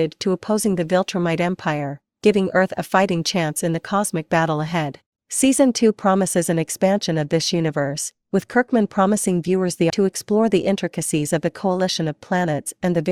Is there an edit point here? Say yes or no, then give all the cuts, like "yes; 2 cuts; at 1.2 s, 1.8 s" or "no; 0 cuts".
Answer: yes; 1 cut; at 9.9 s